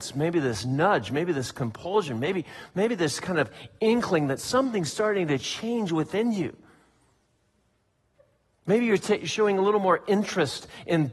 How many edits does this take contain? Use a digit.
0